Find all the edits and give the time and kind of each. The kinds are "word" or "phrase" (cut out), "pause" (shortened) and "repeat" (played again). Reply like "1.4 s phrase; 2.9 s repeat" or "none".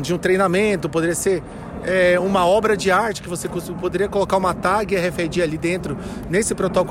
none